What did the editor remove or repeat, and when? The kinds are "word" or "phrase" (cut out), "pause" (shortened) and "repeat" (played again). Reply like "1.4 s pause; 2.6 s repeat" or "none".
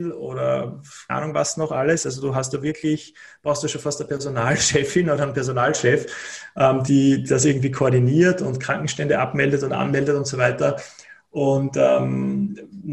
1.1 s word; 6.9 s word